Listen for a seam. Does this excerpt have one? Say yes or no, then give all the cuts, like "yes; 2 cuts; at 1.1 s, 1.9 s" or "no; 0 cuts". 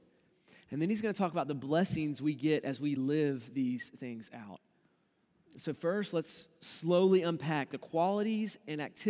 no; 0 cuts